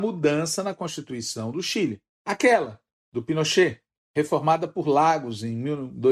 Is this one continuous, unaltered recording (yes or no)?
yes